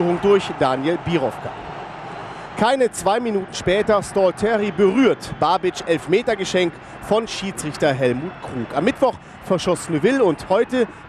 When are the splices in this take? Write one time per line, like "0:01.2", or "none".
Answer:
none